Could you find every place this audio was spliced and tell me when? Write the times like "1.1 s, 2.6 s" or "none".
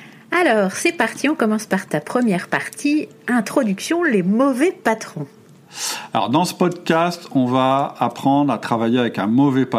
none